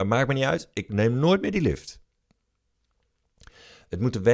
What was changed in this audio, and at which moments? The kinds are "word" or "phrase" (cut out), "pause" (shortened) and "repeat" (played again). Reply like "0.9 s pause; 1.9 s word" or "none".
none

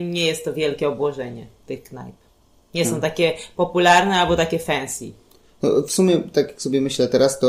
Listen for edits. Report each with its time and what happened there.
none

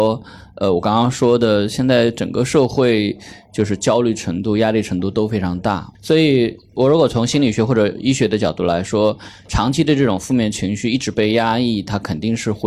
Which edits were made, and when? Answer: 5.9 s pause

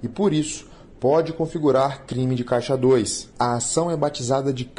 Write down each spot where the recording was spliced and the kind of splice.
3.3 s pause

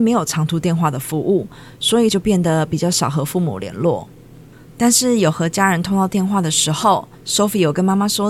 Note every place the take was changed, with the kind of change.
2.1 s word; 7.1 s pause

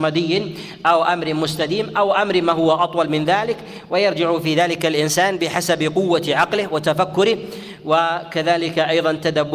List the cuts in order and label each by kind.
none

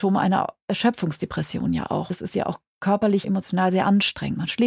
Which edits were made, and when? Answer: 2.1 s word; 3.2 s word

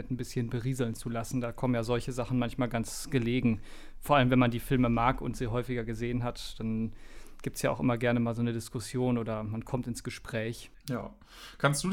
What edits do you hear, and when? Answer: 10.8 s pause

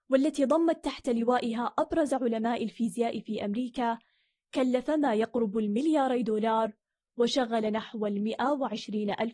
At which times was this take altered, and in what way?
none

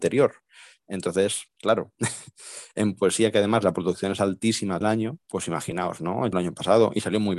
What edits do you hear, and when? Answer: 4.8 s word; 5.2 s pause; 6.3 s phrase

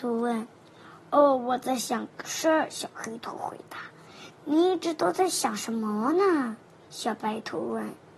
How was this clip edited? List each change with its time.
6.8 s pause

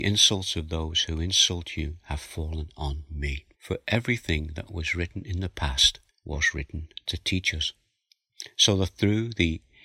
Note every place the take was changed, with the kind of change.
3.5 s pause; 6.1 s pause

